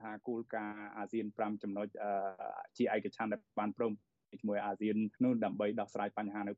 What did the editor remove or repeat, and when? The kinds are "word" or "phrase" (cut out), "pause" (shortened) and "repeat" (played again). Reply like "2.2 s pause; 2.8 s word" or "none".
5.2 s pause